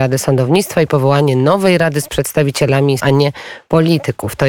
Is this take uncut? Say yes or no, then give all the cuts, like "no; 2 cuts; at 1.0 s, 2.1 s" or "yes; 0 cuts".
no; 1 cut; at 3.0 s